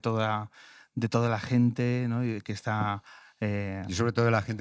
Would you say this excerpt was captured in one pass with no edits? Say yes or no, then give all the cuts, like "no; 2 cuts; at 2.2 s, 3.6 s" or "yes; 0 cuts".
yes; 0 cuts